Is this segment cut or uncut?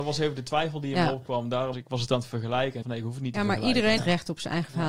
cut